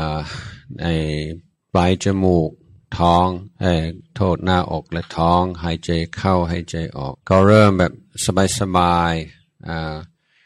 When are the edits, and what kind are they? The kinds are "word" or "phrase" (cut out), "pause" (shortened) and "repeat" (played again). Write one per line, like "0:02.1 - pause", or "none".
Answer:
0:07.2 - pause